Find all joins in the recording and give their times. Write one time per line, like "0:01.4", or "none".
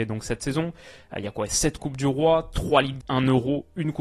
0:03.0